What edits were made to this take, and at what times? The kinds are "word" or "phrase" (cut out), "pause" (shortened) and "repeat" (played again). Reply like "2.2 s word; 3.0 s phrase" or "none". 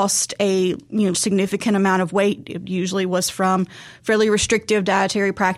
1.1 s word